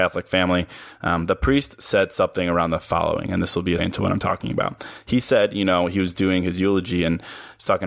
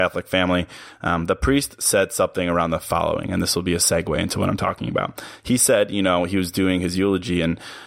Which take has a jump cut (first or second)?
first